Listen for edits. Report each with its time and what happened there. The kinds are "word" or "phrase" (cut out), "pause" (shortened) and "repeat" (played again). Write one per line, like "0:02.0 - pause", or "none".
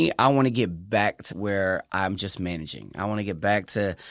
0:01.3 - phrase